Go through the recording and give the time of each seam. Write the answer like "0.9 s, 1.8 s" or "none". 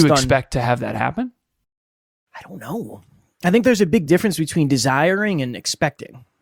none